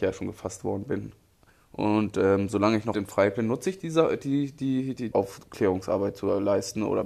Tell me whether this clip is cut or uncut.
cut